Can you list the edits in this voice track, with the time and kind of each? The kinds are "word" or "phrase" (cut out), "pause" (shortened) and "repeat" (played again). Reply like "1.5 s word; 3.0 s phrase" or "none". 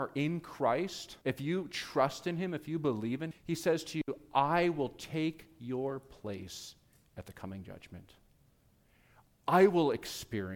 1.2 s pause; 3.3 s word